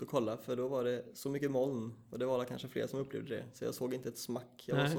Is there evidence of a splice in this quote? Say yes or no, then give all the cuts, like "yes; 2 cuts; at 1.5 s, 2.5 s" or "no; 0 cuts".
no; 0 cuts